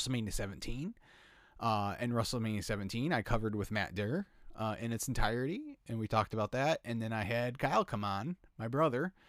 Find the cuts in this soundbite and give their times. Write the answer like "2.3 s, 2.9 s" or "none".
none

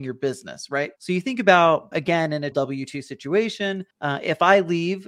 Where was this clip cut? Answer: 1.0 s, 1.9 s, 2.5 s, 3.9 s

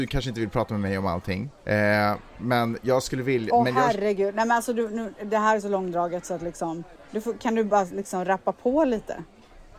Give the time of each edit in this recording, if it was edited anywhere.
1.6 s, 7.0 s

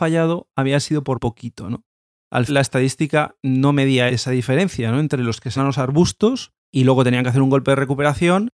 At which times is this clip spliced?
1.1 s, 2.5 s, 5.6 s

